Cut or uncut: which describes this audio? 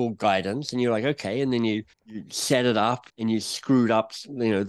cut